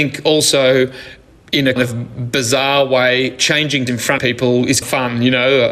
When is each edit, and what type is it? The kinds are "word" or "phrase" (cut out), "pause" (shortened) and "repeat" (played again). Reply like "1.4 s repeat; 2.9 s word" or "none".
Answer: 1.8 s word; 3.9 s word; 4.2 s word; 4.8 s word

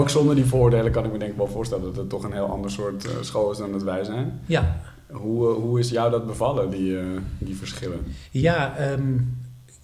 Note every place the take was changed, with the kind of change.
none

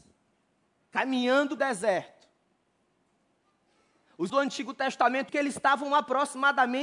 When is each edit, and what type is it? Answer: 1.6 s word; 4.3 s word; 5.3 s word

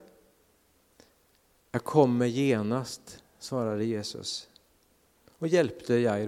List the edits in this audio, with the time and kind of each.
none

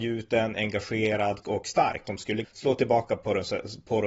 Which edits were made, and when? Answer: 1.4 s word; 2.0 s word; 2.4 s word

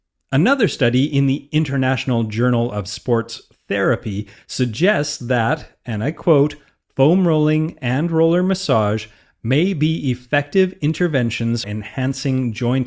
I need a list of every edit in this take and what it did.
11.6 s word

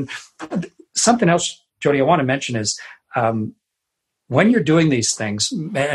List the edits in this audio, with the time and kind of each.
none

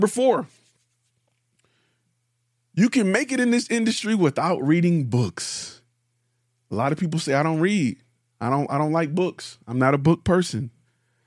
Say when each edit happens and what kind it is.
none

